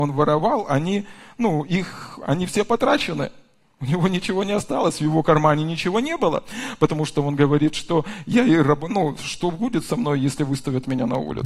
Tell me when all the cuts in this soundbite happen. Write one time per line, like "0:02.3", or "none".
none